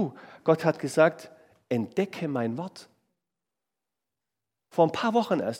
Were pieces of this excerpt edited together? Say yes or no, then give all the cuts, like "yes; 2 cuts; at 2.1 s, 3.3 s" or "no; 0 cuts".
no; 0 cuts